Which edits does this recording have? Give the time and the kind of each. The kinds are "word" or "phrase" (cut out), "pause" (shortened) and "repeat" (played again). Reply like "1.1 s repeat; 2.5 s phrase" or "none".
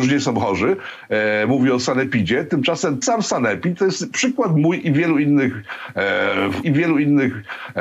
3.0 s word; 6.6 s repeat